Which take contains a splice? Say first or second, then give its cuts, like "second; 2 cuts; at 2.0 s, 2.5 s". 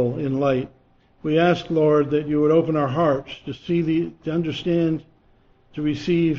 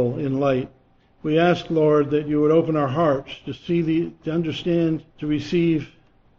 second; 1 cut; at 5.1 s